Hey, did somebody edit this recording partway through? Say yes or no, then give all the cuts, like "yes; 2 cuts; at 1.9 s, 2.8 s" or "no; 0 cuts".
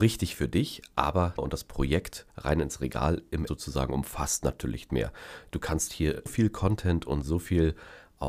yes; 5 cuts; at 1.4 s, 2.3 s, 3.5 s, 4.9 s, 6.3 s